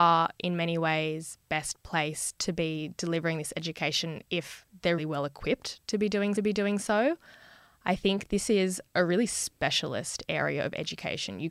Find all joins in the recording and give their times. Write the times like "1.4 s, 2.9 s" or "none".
1.4 s, 5.0 s, 6.4 s